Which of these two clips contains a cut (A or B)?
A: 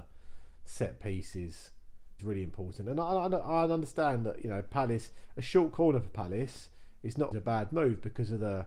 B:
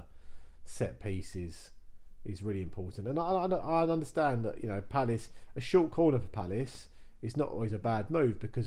A